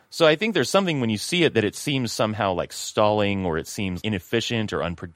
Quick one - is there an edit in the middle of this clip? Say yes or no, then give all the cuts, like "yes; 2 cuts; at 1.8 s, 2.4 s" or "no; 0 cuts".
yes; 1 cut; at 4.0 s